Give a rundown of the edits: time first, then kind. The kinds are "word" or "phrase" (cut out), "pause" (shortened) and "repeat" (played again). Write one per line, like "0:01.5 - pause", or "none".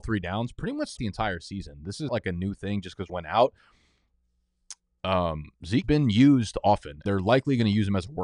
0:01.0 - word
0:02.1 - word
0:03.1 - word
0:05.8 - word
0:07.1 - word